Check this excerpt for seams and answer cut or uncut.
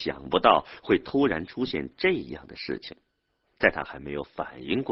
uncut